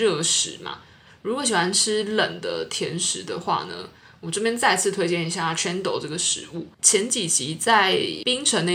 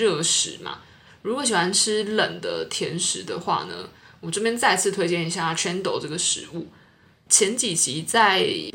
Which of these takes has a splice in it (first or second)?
first